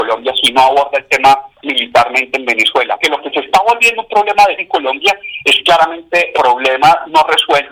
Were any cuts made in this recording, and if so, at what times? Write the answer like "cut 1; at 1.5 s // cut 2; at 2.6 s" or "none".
cut 1; at 1.5 s // cut 2; at 3.0 s // cut 3; at 4.6 s // cut 4; at 6.3 s